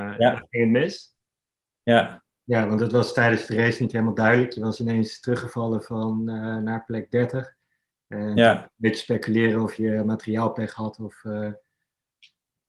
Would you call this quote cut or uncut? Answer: uncut